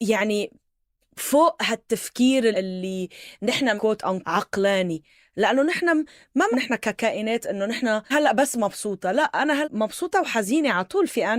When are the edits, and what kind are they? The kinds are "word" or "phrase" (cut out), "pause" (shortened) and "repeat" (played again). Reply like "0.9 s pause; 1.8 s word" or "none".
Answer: 2.5 s word; 3.8 s word; 4.2 s word; 6.5 s word; 8.1 s word; 9.6 s word